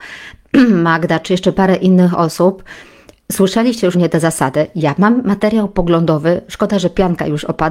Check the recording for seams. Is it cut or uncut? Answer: cut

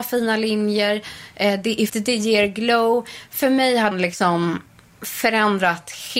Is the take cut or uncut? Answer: cut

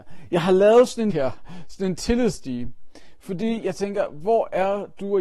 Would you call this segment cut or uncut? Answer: cut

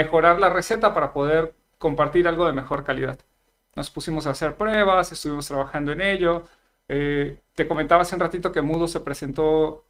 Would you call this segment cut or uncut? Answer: uncut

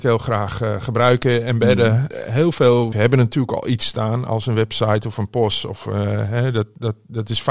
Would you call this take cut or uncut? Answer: cut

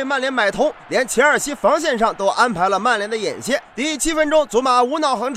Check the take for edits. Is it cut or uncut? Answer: cut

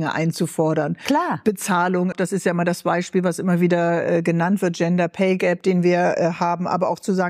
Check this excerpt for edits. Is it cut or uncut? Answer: cut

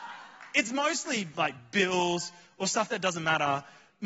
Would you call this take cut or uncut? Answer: uncut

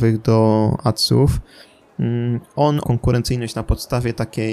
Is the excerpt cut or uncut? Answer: cut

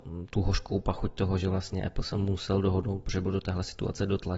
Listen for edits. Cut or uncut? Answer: uncut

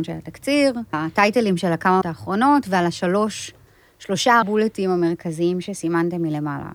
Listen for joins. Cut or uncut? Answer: cut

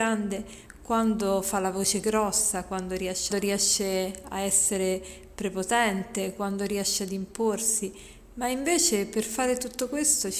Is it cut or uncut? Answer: cut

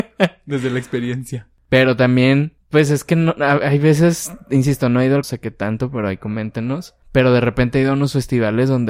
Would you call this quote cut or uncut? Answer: cut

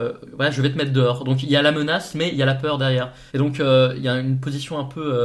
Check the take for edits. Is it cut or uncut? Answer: cut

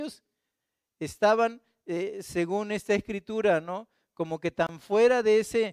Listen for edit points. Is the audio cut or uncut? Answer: uncut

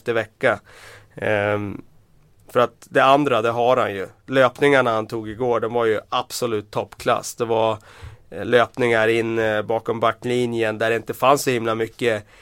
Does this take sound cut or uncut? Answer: uncut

